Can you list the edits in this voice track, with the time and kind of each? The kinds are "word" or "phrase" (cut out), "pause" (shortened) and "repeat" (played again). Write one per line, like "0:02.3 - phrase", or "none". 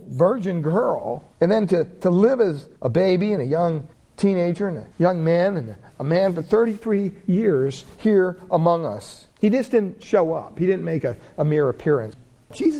0:01.3 - pause
0:02.8 - pause
0:03.9 - pause
0:04.9 - pause
0:09.3 - pause